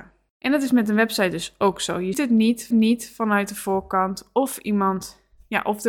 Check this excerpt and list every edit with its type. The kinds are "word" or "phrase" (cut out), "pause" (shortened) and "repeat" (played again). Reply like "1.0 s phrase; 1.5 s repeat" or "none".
2.1 s word; 2.7 s repeat